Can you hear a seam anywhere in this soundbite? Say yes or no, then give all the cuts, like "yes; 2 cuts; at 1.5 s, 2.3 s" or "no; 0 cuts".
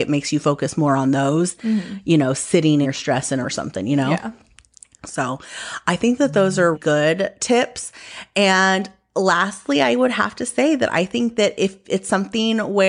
yes; 4 cuts; at 1.6 s, 2.8 s, 3.4 s, 6.7 s